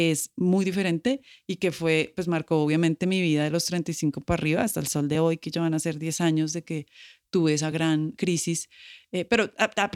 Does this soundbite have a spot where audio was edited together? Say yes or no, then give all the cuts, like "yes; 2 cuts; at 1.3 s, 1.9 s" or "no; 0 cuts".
no; 0 cuts